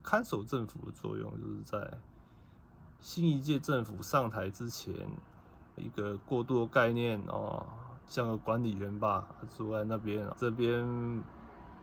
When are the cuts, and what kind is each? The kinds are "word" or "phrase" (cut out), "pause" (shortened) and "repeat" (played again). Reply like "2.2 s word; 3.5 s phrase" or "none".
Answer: 5.8 s word; 8.1 s word; 10.3 s word